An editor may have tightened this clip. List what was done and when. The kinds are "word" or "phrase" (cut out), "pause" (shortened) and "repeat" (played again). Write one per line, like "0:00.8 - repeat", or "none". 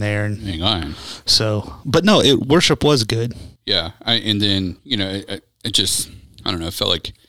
0:03.6 - pause
0:04.8 - pause